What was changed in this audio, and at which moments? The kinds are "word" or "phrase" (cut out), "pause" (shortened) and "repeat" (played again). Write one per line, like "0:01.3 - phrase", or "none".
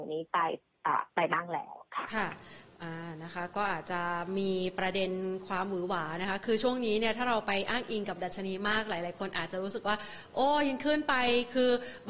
0:01.1 - pause